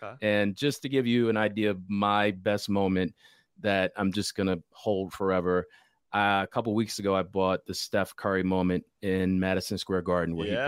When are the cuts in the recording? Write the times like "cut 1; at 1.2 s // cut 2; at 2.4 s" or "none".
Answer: none